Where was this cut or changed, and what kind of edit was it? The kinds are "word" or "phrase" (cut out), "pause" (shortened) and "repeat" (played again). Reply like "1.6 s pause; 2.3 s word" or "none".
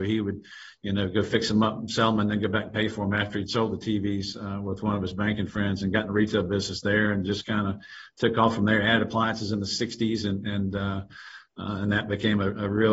none